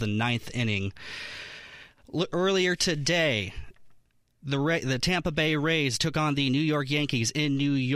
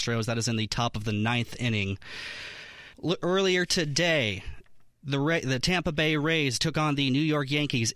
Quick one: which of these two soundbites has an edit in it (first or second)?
second